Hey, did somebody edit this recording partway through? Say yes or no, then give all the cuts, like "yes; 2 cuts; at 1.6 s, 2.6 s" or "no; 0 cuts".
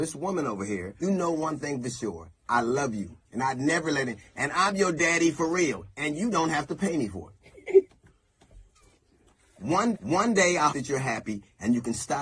yes; 4 cuts; at 1.0 s, 3.2 s, 9.9 s, 10.7 s